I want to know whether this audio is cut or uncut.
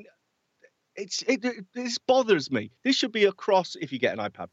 cut